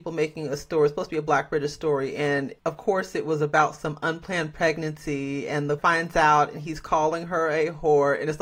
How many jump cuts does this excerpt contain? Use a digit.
2